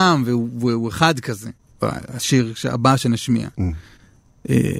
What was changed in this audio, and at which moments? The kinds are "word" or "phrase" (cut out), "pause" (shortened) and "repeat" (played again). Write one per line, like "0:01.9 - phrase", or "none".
0:01.6 - pause